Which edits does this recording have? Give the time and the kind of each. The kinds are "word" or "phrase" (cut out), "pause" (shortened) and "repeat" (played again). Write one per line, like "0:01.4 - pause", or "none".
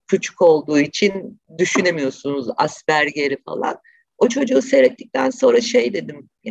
none